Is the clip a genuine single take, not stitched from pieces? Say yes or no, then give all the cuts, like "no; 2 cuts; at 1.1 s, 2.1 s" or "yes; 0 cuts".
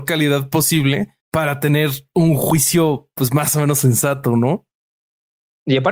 no; 1 cut; at 1.2 s